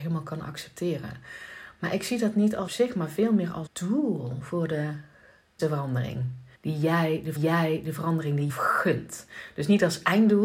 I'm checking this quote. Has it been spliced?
yes; 6 cuts; at 2.7 s, 3.7 s, 5.6 s, 6.5 s, 7.4 s, 8.5 s

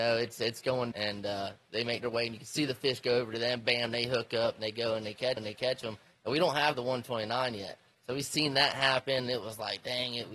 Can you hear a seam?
yes; 2 cuts; at 0.9 s, 5.4 s

